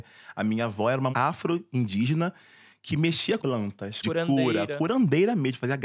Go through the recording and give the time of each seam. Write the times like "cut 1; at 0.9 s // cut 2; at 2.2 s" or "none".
cut 1; at 1.1 s // cut 2; at 3.4 s // cut 3; at 4.0 s